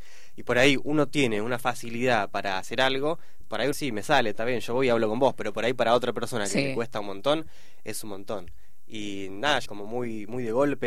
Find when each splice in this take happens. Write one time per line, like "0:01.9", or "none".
0:03.4
0:03.7
0:09.7